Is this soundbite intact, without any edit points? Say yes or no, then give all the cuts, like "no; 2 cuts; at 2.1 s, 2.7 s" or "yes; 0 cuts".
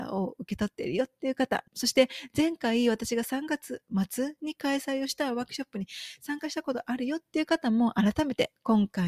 no; 1 cut; at 1.7 s